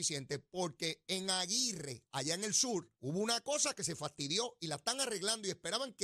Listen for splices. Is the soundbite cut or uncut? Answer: cut